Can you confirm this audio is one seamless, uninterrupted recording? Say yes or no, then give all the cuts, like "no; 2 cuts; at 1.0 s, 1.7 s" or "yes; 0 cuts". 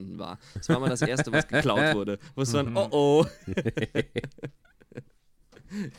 yes; 0 cuts